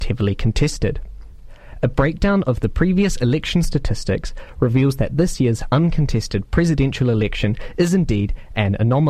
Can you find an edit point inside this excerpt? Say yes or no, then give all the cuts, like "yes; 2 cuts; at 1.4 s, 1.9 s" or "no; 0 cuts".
no; 0 cuts